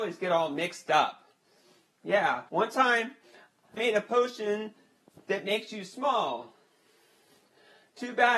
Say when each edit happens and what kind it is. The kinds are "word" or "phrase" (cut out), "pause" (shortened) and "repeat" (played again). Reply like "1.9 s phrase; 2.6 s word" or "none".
2.5 s pause; 3.8 s word